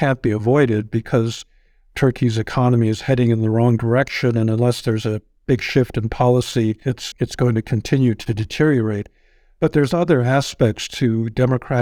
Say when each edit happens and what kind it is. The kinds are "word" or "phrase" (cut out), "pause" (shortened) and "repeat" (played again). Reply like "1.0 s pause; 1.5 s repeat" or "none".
7.1 s word